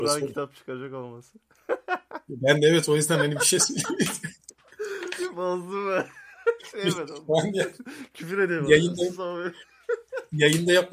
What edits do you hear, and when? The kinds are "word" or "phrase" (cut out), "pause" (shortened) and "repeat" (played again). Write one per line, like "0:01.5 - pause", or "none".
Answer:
none